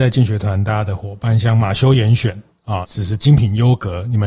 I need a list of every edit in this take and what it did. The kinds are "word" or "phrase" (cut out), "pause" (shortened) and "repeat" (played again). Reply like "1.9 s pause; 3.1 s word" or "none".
2.8 s word